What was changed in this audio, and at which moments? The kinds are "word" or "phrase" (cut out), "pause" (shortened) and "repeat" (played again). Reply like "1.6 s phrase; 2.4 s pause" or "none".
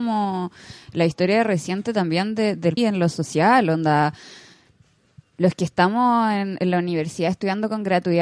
2.8 s word

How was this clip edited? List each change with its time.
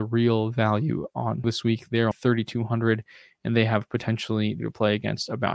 1.4 s word; 2.1 s word; 4.6 s word

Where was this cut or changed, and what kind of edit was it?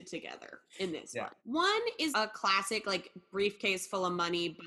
1.4 s pause; 2.1 s word

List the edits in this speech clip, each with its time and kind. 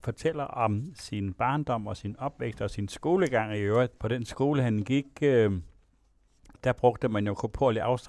4.0 s pause

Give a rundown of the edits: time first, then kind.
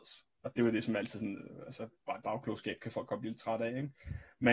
2.2 s word

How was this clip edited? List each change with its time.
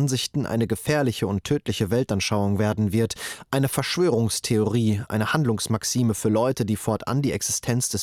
none

